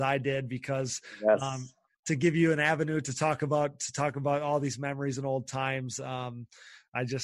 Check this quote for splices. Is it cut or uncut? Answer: uncut